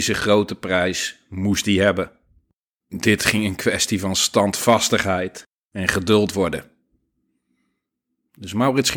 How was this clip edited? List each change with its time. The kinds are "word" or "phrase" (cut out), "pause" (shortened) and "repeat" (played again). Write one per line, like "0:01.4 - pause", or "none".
0:02.6 - pause
0:05.5 - pause